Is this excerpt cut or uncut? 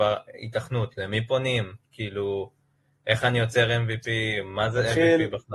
uncut